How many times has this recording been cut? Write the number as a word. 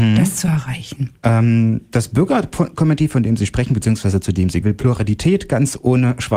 two